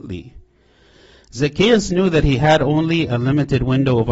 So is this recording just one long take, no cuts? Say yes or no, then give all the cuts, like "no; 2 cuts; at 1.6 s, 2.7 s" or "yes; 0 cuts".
yes; 0 cuts